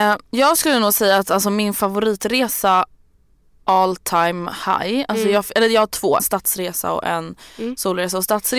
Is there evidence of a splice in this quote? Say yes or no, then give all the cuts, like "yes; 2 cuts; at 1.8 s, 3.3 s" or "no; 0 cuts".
yes; 1 cut; at 6.2 s